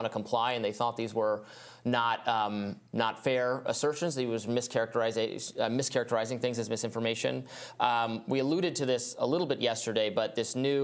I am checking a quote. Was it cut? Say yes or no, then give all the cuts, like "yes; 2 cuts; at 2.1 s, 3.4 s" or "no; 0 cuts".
yes; 1 cut; at 2.9 s